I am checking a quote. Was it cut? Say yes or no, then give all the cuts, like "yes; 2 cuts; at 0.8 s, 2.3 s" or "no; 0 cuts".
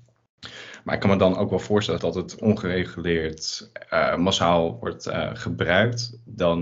yes; 1 cut; at 2.0 s